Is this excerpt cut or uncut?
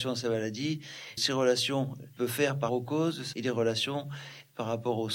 cut